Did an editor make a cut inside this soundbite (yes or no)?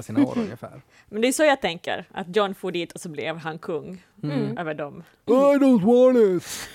yes